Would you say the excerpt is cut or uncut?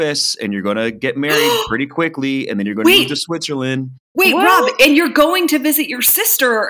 uncut